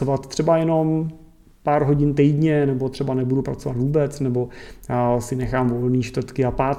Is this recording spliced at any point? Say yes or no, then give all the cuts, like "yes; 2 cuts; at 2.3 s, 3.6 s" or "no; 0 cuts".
no; 0 cuts